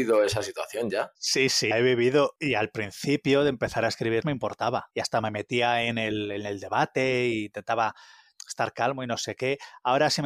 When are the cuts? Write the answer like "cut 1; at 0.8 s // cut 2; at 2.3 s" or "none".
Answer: cut 1; at 1.7 s // cut 2; at 4.2 s